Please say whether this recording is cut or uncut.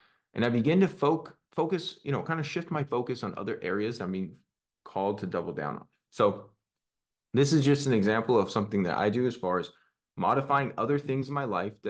uncut